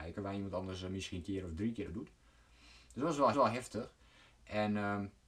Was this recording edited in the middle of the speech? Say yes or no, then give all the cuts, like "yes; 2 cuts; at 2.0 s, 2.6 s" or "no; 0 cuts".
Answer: yes; 3 cuts; at 1.2 s, 1.9 s, 3.3 s